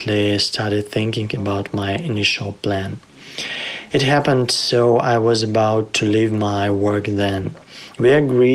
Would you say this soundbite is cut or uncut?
uncut